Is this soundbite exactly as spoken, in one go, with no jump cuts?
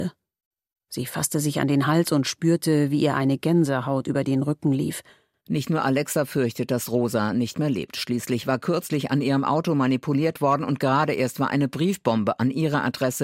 yes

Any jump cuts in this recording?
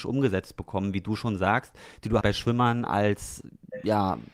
yes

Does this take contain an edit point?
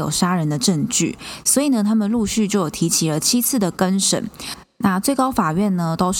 no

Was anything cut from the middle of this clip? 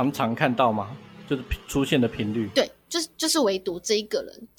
no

